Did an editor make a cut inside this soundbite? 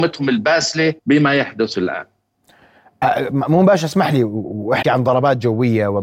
yes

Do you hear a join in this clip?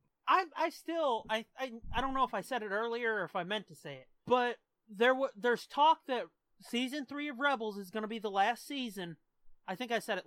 no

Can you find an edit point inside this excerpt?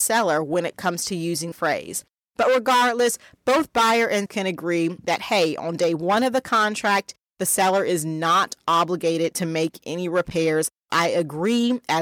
yes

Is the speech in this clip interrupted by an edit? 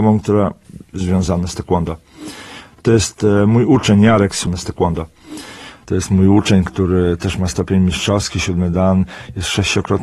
no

